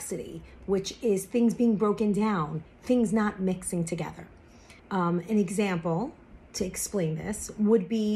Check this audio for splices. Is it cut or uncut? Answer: cut